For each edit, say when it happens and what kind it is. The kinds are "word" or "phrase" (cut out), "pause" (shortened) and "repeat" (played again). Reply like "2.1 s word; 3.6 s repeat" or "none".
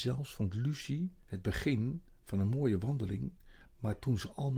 none

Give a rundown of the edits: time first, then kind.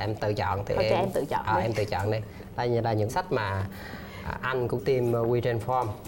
3.1 s word; 4.8 s word

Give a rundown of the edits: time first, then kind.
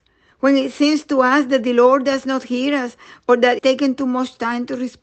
3.6 s word

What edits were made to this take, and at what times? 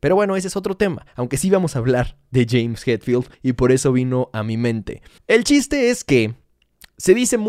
1.1 s pause; 3.3 s pause; 5.2 s pause

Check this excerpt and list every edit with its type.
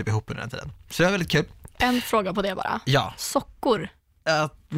none

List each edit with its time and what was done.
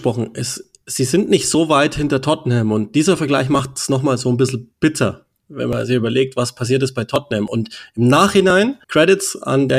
8.8 s pause

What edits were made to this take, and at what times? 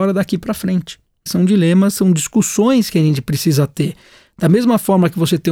none

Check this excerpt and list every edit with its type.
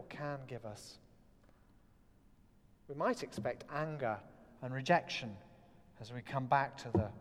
none

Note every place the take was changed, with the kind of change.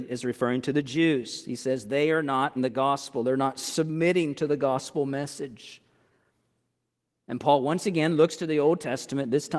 2.6 s word

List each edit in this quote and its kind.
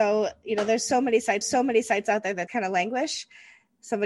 1.4 s repeat; 2.5 s word

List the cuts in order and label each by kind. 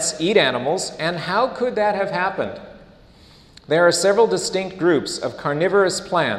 none

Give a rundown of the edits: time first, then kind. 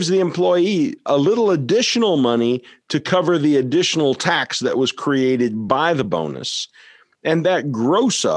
none

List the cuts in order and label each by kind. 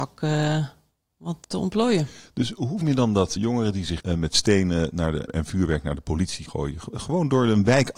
1.4 s word; 2.8 s word; 3.4 s word; 4.0 s word; 5.3 s word; 6.5 s word

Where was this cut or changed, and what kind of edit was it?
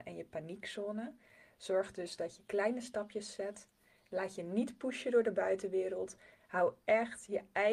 none

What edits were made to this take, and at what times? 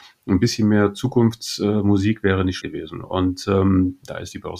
2.6 s word

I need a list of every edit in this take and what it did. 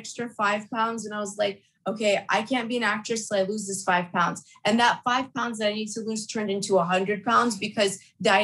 none

